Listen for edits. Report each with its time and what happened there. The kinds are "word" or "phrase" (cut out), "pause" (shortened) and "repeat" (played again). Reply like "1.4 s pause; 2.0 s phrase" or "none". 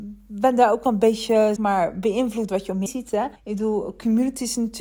1.6 s word; 2.5 s phrase; 2.9 s word; 3.4 s pause